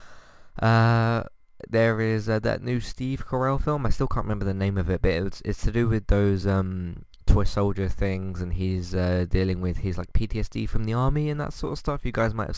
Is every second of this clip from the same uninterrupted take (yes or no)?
yes